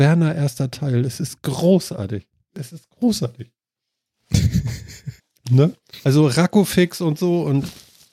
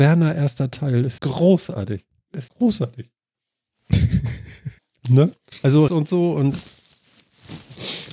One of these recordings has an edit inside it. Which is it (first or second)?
second